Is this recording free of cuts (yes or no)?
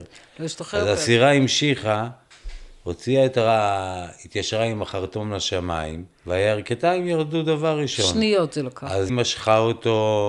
no